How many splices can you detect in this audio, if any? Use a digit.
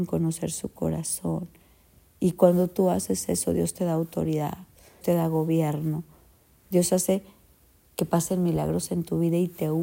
1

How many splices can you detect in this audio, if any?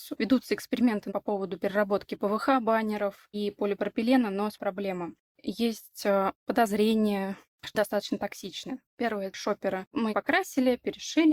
3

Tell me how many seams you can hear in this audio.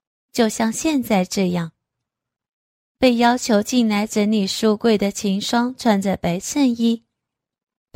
0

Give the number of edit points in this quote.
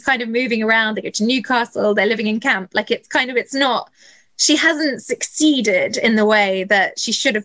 0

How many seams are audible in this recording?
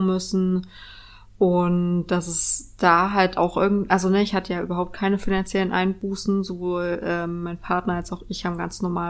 0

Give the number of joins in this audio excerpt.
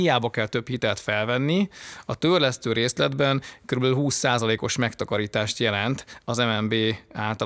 0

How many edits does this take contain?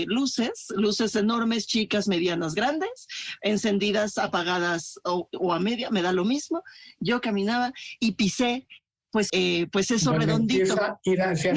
1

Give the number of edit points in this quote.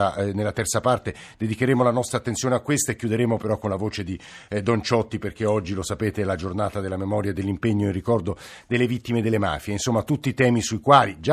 0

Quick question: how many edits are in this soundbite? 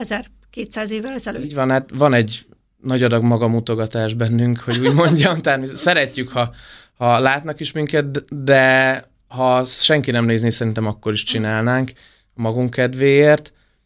0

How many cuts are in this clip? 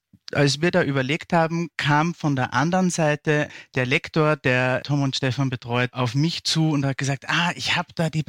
0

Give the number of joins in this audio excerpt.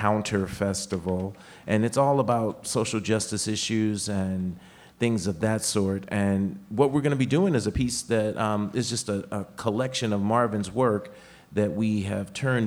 0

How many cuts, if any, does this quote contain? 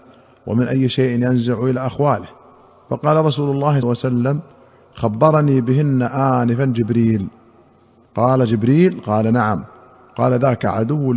1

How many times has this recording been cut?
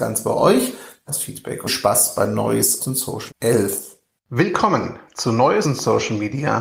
5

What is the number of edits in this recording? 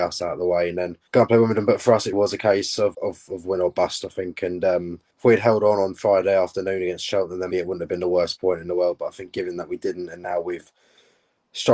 5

